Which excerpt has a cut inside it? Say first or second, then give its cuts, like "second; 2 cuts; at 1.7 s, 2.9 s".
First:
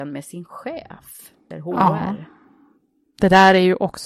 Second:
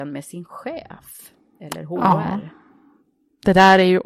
first; 1 cut; at 1.5 s